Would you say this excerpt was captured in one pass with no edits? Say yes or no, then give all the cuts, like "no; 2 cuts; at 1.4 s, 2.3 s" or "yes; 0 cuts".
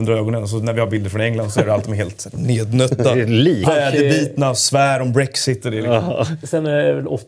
yes; 0 cuts